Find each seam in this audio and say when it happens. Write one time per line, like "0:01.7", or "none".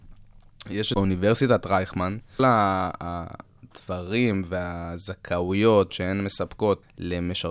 0:00.9
0:02.4
0:05.9

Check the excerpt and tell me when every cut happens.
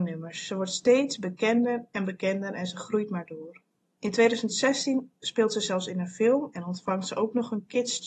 none

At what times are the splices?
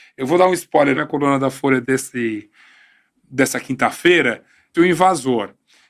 0:00.9
0:01.8
0:04.7

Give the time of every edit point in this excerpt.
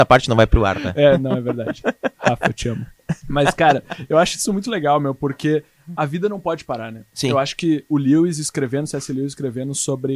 0:03.2

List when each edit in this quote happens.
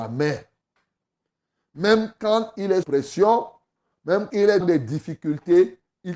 0:02.8
0:04.3
0:04.6

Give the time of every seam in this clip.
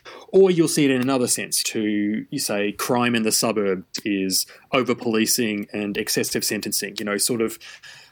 0:01.6

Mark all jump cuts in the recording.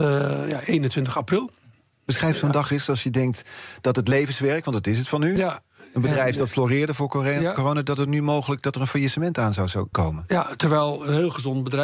0:09.9

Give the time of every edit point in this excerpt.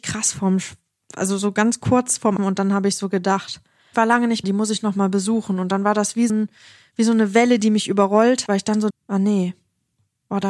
0:02.4
0:03.9
0:04.4
0:06.3
0:08.5
0:08.9

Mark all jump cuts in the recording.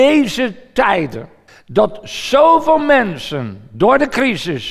0:01.5

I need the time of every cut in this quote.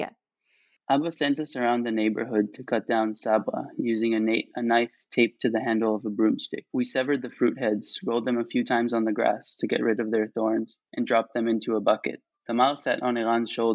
0:06.7
0:10.9
0:12.3

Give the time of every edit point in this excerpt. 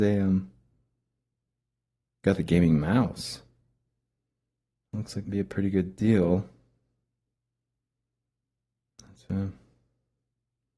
0:02.2
0:05.2

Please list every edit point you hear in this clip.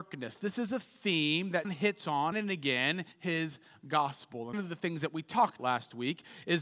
0:01.6
0:02.3
0:03.1
0:04.5
0:05.6

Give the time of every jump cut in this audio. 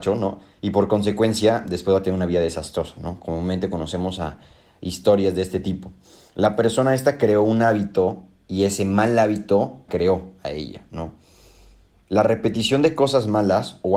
0:09.9

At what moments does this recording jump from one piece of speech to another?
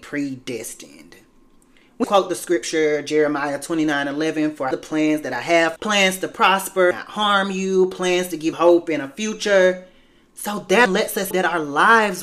0:02.0
0:04.7
0:05.8
0:06.9
0:08.5
0:10.9
0:11.3

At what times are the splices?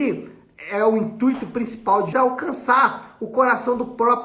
0:02.1

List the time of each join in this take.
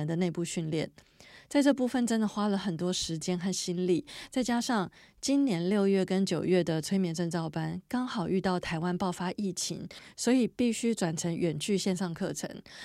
none

